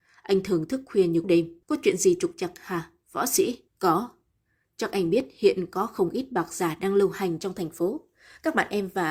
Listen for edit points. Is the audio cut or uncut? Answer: cut